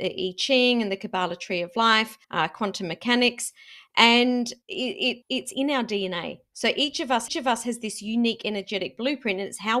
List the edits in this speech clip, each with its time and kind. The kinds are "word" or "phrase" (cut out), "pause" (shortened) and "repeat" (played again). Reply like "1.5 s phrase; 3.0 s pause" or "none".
2.2 s pause; 4.6 s pause; 5.2 s word; 7.3 s repeat